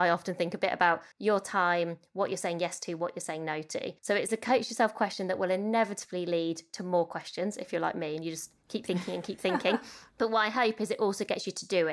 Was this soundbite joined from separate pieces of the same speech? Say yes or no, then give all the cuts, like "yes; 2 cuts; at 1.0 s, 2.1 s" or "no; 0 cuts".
yes; 3 cuts; at 1.1 s, 4.0 s, 10.1 s